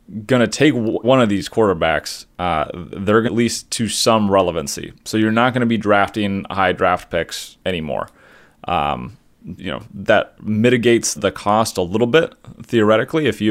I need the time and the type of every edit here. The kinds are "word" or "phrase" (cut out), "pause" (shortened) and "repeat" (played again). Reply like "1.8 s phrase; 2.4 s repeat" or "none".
1.0 s word; 2.3 s pause; 3.2 s phrase; 7.6 s pause; 9.6 s word; 11.2 s word